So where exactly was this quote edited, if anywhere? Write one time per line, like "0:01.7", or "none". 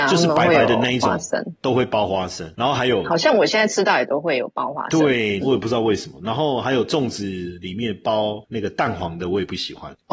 0:05.4

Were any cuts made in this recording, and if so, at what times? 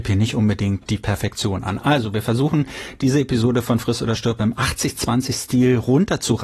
none

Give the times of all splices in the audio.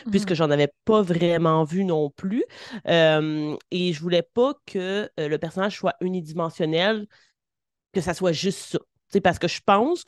none

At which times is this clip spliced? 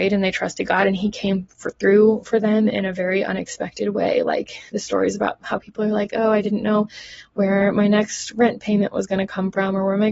none

